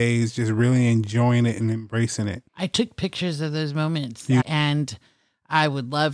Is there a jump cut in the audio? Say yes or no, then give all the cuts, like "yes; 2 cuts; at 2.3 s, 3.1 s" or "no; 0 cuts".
yes; 2 cuts; at 2.5 s, 4.4 s